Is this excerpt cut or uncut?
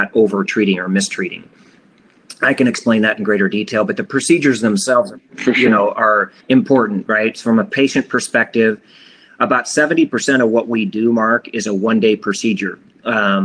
cut